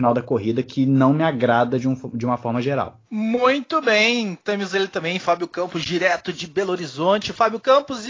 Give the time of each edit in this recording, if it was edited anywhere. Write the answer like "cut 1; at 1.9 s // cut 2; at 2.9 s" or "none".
cut 1; at 3.0 s